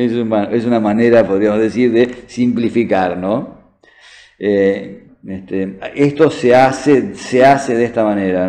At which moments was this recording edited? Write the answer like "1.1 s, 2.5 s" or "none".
5.1 s